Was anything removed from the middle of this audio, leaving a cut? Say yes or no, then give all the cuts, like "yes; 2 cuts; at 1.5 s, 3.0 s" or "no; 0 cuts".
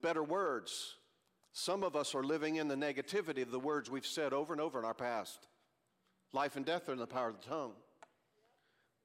no; 0 cuts